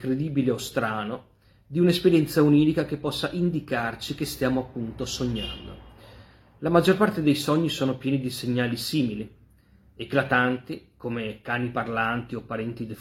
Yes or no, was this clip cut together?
no